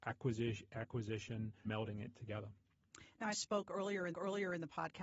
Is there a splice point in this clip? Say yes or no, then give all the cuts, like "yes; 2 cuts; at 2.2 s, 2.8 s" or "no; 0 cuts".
yes; 3 cuts; at 1.7 s, 3.3 s, 4.1 s